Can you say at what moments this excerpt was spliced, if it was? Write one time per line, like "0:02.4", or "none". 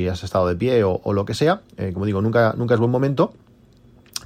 none